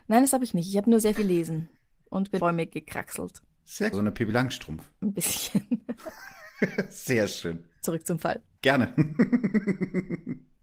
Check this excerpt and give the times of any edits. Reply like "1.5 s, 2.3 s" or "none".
1.2 s, 1.8 s, 2.4 s, 3.9 s, 5.0 s, 7.7 s